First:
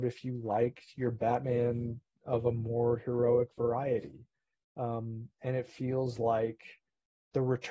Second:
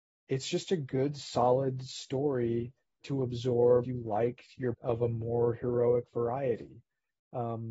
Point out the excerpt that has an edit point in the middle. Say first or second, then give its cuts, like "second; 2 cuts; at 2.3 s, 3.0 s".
second; 3 cuts; at 3.0 s, 3.8 s, 4.7 s